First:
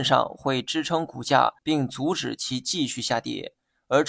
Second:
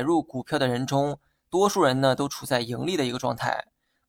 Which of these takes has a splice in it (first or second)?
first